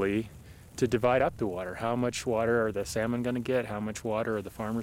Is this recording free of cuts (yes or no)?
yes